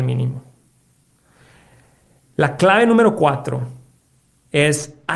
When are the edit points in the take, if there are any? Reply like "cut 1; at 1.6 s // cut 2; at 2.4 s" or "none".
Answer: none